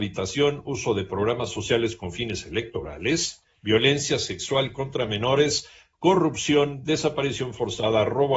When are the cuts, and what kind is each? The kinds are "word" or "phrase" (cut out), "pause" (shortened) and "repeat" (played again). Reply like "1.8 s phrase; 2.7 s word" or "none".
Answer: none